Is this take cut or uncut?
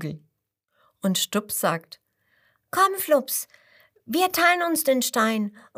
uncut